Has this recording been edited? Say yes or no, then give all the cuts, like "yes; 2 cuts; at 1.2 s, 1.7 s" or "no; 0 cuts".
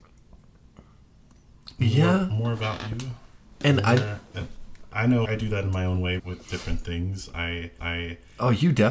yes; 3 cuts; at 5.2 s, 6.2 s, 7.8 s